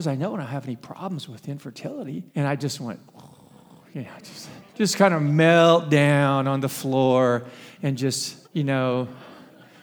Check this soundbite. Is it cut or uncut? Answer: cut